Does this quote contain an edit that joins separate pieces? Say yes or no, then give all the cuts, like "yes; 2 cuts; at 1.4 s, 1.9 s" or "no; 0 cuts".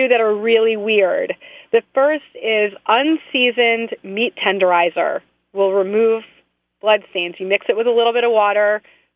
no; 0 cuts